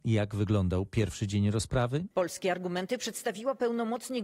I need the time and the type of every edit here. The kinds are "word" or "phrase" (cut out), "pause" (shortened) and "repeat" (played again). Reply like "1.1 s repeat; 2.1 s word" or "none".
2.1 s pause